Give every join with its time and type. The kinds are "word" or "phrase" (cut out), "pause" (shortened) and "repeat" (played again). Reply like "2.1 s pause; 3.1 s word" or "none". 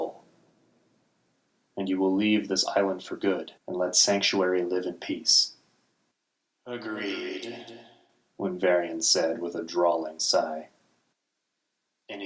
3.6 s pause; 6.1 s pause